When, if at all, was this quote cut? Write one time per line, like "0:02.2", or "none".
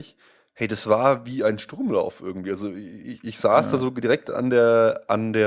none